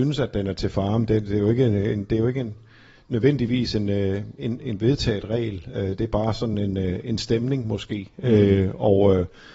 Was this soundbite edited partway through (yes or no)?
no